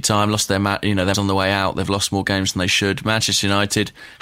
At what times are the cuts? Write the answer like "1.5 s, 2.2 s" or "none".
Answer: 1.1 s

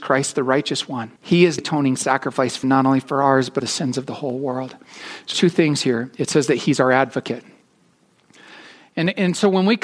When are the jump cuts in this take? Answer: 1.2 s, 1.6 s, 2.6 s, 3.6 s, 5.3 s

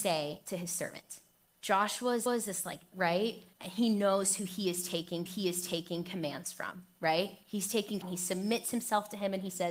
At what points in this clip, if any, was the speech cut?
1.4 s, 2.3 s, 2.9 s, 3.5 s, 5.3 s, 8.0 s

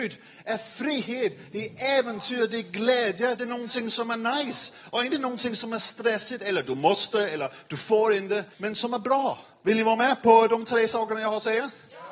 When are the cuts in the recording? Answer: 8.5 s, 9.5 s

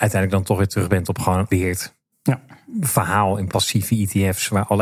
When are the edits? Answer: 1.5 s, 3.5 s

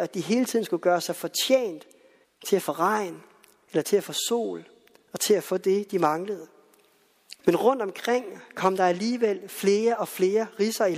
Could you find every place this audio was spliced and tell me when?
2.2 s, 7.4 s

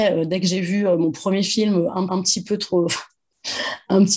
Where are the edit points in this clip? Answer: 2.1 s

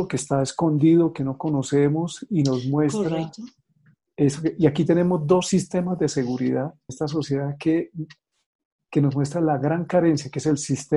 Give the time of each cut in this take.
6.9 s

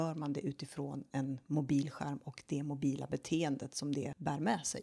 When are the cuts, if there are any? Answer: none

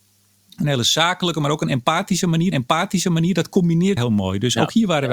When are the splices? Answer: 2.5 s, 4.0 s

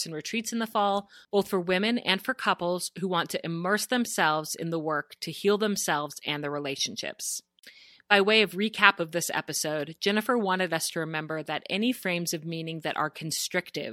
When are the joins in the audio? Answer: none

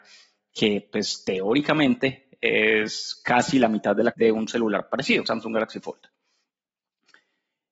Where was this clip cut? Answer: 4.1 s, 5.2 s

